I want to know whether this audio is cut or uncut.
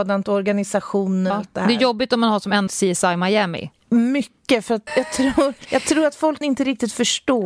cut